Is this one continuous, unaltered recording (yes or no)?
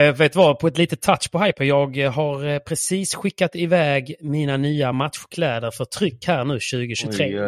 yes